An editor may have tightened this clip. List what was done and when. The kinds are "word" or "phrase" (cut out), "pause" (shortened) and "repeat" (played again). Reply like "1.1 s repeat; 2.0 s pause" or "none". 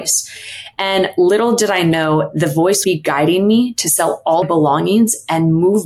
2.8 s word; 4.4 s phrase